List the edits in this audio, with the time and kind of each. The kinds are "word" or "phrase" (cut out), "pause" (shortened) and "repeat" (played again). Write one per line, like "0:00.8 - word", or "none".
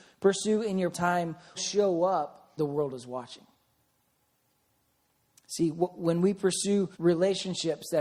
0:00.9 - word
0:01.5 - word
0:02.6 - word
0:06.9 - pause

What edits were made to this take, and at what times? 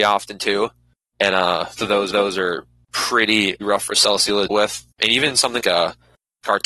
0:01.8 - word
0:02.1 - repeat
0:03.6 - word
0:04.5 - word
0:04.9 - pause
0:05.6 - word

